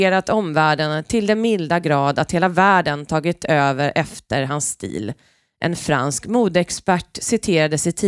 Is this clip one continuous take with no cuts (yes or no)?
yes